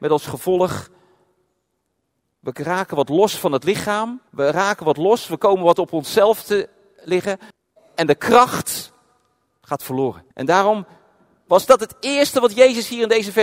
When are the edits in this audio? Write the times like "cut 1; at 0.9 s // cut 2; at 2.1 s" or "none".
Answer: cut 1; at 4.3 s // cut 2; at 7.5 s // cut 3; at 10.3 s